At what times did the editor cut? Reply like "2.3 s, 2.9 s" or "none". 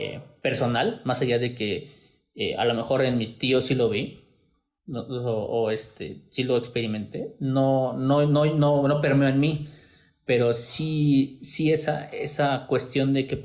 none